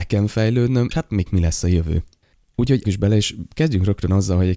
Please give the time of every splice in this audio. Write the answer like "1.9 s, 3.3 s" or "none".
0.9 s, 1.3 s, 2.8 s